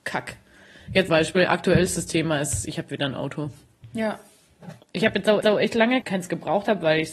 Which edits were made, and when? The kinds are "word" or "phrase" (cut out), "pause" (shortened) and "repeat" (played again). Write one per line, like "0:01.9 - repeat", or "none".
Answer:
0:01.1 - word
0:04.8 - pause
0:05.4 - repeat
0:06.0 - phrase